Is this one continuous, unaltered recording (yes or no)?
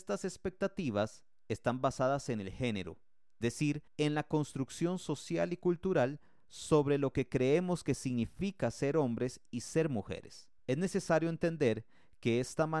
no